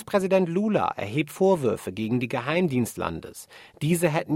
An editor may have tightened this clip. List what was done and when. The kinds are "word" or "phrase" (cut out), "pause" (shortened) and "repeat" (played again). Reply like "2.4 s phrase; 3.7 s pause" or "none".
1.3 s word; 2.9 s word